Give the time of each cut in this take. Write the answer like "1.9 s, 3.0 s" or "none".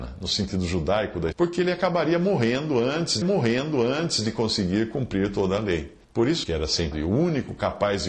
1.3 s, 3.2 s, 6.0 s, 6.4 s, 6.9 s